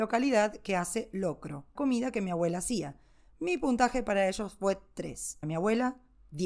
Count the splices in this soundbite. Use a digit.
2